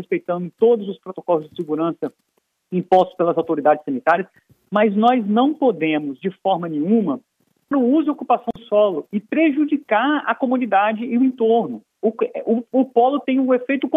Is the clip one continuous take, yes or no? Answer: no